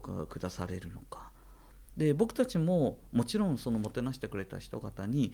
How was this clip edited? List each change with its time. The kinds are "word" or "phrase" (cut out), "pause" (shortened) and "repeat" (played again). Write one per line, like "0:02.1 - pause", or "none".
0:01.8 - pause